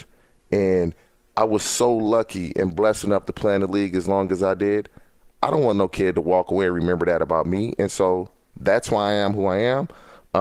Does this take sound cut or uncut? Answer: uncut